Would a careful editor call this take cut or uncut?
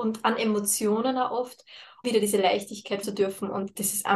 cut